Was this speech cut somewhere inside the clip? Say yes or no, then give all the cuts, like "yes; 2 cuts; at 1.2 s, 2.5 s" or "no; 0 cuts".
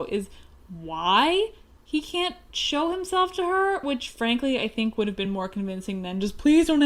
no; 0 cuts